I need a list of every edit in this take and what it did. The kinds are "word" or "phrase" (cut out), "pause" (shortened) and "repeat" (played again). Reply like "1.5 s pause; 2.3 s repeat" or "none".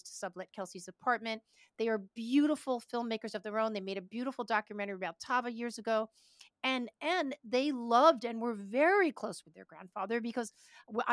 none